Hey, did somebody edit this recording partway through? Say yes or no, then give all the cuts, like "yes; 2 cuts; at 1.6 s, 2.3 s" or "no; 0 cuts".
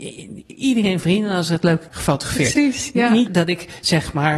yes; 3 cuts; at 1.0 s, 1.9 s, 3.3 s